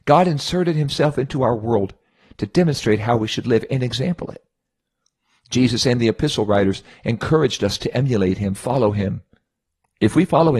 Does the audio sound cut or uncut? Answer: uncut